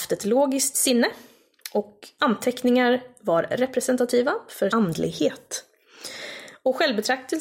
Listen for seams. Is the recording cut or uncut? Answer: cut